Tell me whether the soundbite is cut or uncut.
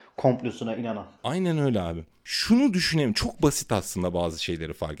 cut